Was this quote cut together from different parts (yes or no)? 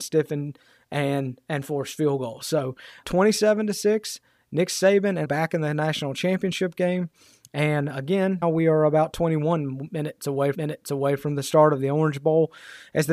yes